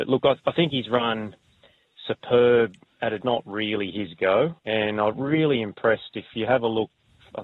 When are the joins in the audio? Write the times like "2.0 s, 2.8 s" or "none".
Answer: 2.9 s, 3.2 s, 4.6 s